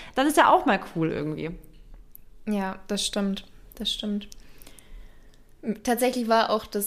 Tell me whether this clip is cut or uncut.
uncut